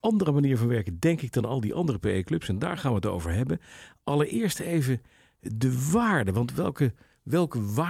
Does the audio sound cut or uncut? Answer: uncut